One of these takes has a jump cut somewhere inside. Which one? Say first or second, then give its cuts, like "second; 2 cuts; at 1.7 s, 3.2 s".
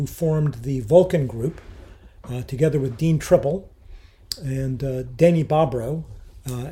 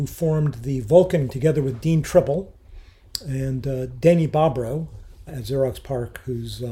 second; 2 cuts; at 1.3 s, 5.3 s